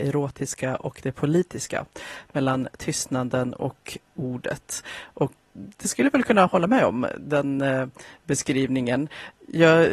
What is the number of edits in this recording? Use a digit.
1